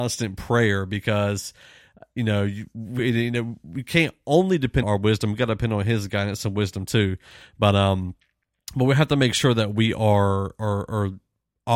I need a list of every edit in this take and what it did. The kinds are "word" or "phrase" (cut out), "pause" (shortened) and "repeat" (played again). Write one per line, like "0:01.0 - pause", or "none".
0:03.0 - word
0:04.8 - word